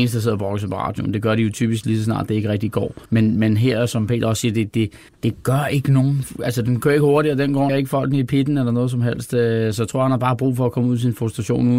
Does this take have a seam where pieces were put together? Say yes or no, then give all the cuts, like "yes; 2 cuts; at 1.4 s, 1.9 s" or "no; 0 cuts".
yes; 3 cuts; at 3.1 s, 5.1 s, 7.7 s